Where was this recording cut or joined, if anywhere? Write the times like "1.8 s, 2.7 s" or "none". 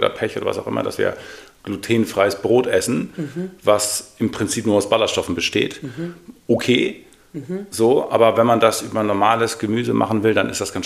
none